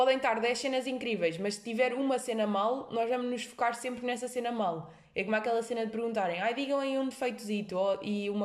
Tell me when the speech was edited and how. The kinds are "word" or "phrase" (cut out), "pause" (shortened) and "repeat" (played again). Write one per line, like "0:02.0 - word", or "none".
none